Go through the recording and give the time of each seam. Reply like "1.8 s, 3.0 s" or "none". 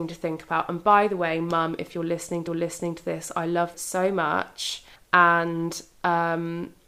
2.5 s, 3.7 s, 5.0 s